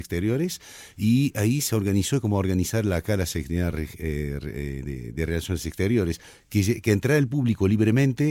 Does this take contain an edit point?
no; 0 cuts

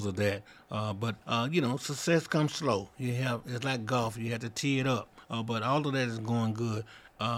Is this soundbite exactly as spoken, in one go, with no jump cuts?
no; 2 cuts; at 1.2 s, 5.2 s

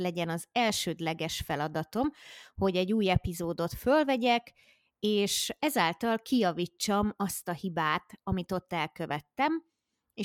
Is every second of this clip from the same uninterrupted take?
yes; 0 cuts

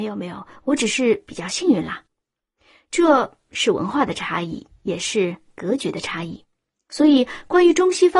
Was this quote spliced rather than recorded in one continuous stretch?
no; 0 cuts

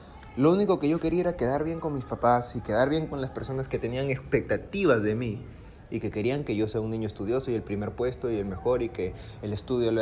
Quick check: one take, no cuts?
yes; 0 cuts

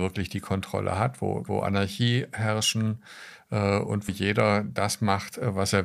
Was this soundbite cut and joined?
yes; 2 cuts; at 1.5 s, 4.1 s

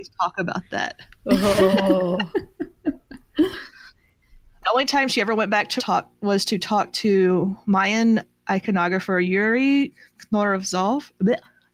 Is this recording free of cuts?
no; 2 cuts; at 4.6 s, 5.8 s

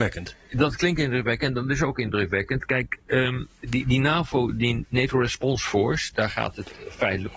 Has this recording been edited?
yes; 1 cut; at 3.6 s

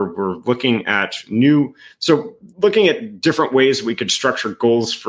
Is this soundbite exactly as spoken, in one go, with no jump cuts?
no; 1 cut; at 2.5 s

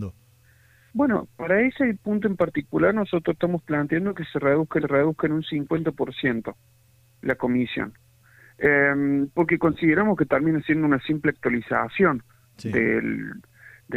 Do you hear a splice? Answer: yes; 1 cut; at 4.8 s

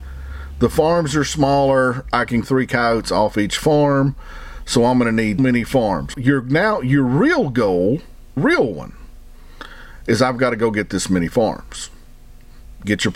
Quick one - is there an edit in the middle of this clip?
yes; 4 cuts; at 2.4 s, 5.4 s, 6.1 s, 8.4 s

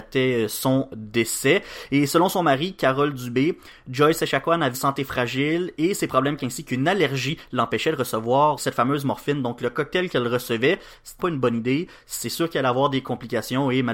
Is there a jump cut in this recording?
yes; 4 cuts; at 4.7 s, 6.4 s, 8.6 s, 11.2 s

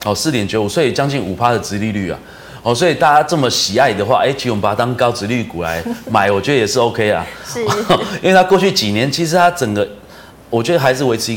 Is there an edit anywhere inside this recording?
no; 0 cuts

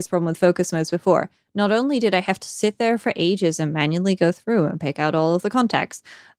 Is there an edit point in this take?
no; 0 cuts

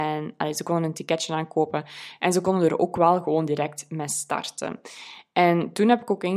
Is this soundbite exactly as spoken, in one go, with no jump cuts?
yes; 0 cuts

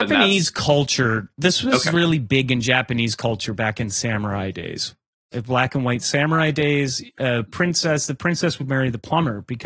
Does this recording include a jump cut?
no; 0 cuts

